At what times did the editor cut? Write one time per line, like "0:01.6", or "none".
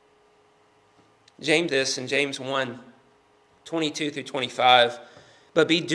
0:01.7